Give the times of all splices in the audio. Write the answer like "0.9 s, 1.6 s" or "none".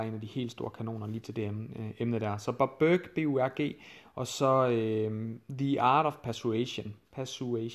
1.2 s